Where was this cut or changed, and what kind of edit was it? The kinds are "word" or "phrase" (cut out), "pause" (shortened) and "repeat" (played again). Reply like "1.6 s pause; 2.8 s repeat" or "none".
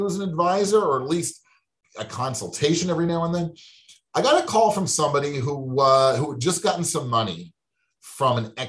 none